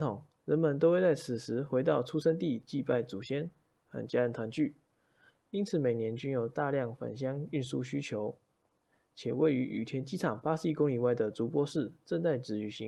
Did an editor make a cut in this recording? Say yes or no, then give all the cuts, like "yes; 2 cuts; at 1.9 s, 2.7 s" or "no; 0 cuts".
no; 0 cuts